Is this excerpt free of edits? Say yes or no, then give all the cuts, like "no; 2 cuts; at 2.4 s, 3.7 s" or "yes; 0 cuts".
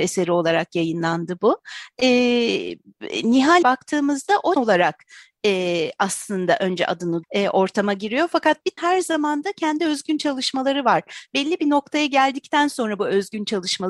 no; 4 cuts; at 3.6 s, 4.6 s, 7.2 s, 8.8 s